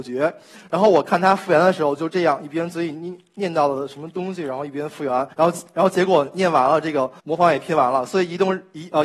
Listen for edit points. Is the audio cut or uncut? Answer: cut